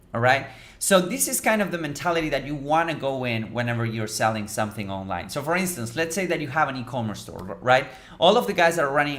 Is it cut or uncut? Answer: uncut